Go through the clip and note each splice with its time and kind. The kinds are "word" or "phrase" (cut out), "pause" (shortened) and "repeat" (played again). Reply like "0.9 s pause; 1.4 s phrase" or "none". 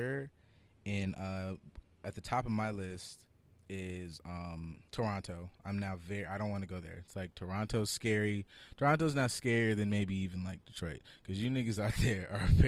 3.5 s pause; 4.9 s pause